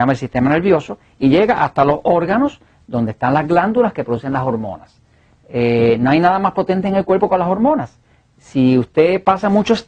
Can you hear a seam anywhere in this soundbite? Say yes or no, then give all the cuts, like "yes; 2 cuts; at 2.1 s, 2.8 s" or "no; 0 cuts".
no; 0 cuts